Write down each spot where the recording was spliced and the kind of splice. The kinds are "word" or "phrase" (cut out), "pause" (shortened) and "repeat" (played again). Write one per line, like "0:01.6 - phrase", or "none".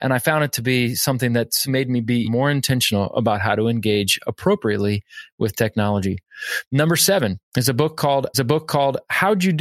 0:01.7 - word
0:02.2 - word
0:07.5 - pause
0:08.3 - repeat